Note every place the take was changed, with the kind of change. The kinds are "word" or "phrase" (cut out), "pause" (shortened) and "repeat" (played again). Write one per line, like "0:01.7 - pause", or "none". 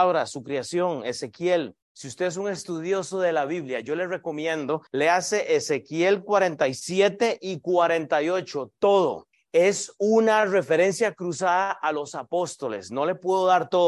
0:01.8 - pause
0:04.9 - pause
0:09.3 - pause